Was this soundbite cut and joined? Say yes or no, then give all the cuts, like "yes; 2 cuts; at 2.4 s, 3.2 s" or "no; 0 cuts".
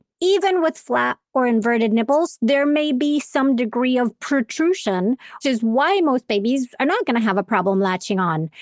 yes; 1 cut; at 5.4 s